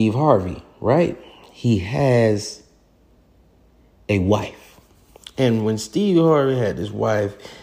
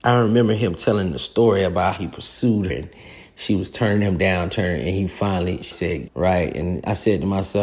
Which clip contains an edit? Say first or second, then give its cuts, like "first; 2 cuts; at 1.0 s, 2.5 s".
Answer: second; 4 cuts; at 2.0 s, 2.7 s, 5.7 s, 6.1 s